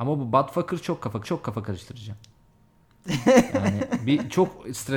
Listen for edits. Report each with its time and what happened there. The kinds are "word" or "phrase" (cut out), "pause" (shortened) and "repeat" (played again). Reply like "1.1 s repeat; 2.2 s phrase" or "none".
1.2 s repeat